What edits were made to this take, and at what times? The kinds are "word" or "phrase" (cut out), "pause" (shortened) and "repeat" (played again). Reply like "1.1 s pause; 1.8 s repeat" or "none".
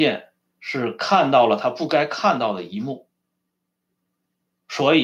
none